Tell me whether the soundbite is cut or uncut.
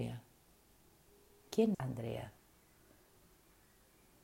cut